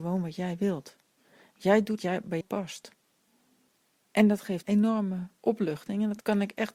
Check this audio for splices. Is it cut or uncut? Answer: cut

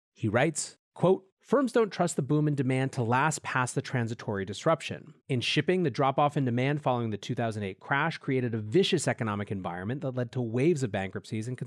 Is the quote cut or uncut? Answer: cut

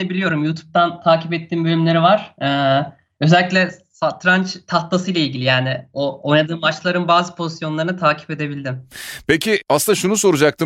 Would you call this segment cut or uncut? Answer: uncut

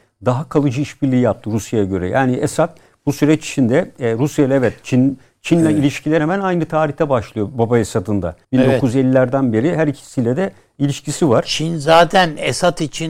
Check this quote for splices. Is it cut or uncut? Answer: cut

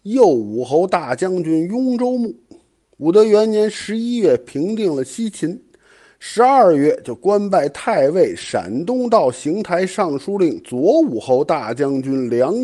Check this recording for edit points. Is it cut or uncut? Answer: uncut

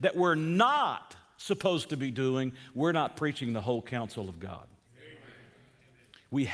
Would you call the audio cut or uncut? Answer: uncut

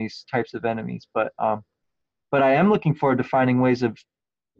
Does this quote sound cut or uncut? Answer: uncut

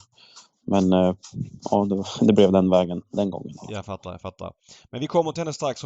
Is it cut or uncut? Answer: uncut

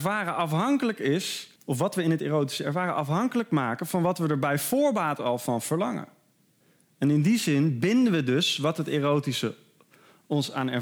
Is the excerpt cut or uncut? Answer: cut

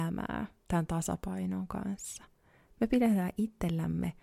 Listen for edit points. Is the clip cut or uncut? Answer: uncut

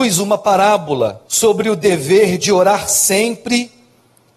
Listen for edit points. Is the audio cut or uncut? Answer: cut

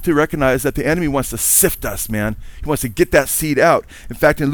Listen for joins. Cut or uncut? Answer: uncut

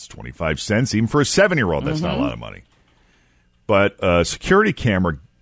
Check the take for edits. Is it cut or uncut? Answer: uncut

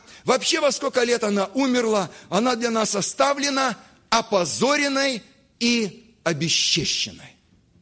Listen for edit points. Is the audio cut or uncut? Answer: uncut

